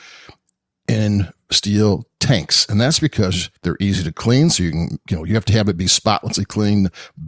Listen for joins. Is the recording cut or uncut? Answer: cut